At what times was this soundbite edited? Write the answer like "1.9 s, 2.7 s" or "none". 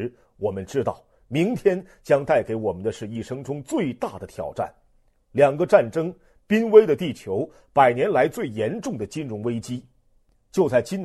none